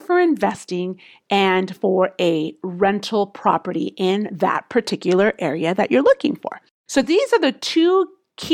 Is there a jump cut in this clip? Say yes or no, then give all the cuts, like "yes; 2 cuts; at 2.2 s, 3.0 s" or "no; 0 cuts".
no; 0 cuts